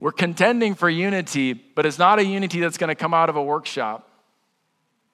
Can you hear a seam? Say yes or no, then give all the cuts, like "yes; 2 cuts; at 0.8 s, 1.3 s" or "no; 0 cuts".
no; 0 cuts